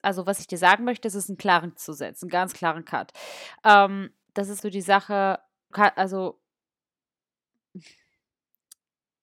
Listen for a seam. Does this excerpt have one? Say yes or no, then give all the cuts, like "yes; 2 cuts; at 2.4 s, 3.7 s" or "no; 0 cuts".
yes; 5 cuts; at 1.8 s, 2.5 s, 4.3 s, 4.6 s, 5.7 s